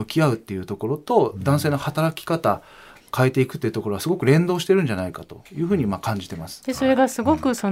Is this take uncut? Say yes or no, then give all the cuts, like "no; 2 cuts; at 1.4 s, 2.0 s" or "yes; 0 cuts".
yes; 0 cuts